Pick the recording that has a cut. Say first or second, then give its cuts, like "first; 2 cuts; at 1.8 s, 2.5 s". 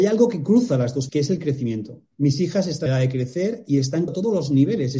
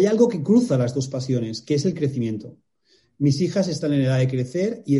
first; 4 cuts; at 1.1 s, 2.1 s, 2.9 s, 4.1 s